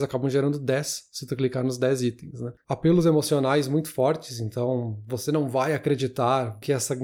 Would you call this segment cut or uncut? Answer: cut